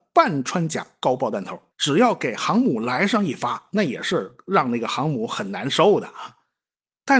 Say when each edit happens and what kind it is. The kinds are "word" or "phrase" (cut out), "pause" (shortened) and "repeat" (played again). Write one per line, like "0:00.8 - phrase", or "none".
0:01.7 - pause